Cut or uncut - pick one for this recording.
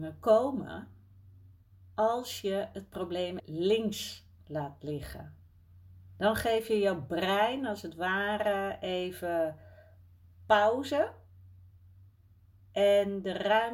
cut